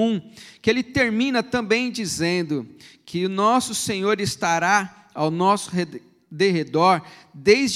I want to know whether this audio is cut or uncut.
uncut